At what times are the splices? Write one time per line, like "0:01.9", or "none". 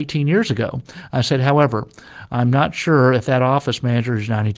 none